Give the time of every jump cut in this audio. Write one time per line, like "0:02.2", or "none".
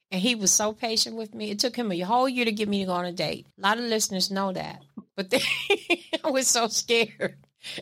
0:03.5
0:05.1